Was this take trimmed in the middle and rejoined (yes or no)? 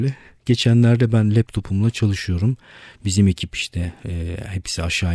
no